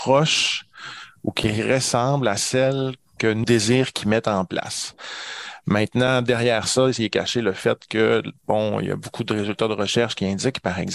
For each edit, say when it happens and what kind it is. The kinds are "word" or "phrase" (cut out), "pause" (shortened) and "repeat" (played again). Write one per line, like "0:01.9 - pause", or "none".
0:03.4 - word
0:08.4 - pause